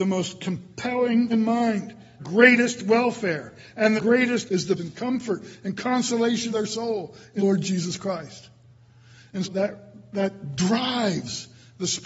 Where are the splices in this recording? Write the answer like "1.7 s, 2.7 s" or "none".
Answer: 1.3 s, 2.2 s, 4.0 s, 4.5 s, 4.8 s, 6.5 s, 7.4 s, 9.4 s